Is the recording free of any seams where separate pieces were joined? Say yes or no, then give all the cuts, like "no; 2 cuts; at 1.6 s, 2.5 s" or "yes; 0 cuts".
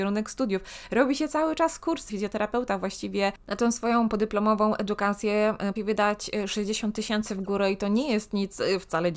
no; 2 cuts; at 2.1 s, 5.8 s